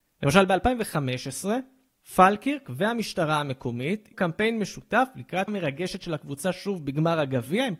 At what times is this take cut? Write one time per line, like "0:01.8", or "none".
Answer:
0:01.9
0:04.1
0:05.5